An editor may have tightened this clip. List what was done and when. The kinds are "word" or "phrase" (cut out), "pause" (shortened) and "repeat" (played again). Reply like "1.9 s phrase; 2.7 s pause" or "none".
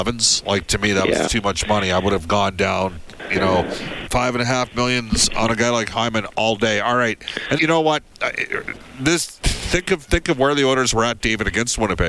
1.3 s word; 4.1 s word; 7.6 s word